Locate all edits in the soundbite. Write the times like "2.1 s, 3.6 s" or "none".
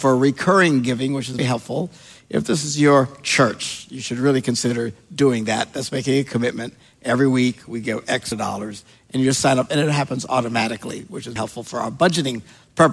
1.4 s, 8.3 s, 11.4 s